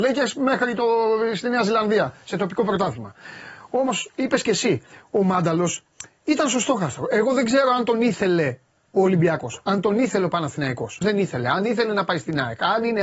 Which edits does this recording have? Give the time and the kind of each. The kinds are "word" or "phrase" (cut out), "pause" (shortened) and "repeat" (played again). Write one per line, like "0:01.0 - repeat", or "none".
0:11.0 - phrase